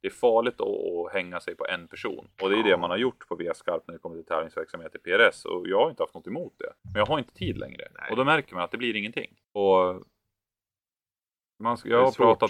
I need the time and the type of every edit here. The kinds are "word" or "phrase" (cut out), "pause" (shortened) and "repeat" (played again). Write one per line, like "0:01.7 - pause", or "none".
0:02.3 - pause
0:06.8 - pause
0:09.4 - pause